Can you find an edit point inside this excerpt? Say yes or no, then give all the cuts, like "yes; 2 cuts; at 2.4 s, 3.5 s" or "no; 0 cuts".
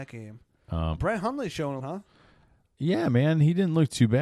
yes; 2 cuts; at 1.0 s, 1.8 s